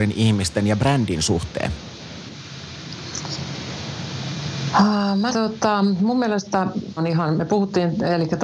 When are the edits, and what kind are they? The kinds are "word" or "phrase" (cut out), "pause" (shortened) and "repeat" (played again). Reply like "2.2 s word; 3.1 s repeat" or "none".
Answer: 5.3 s word; 7.0 s word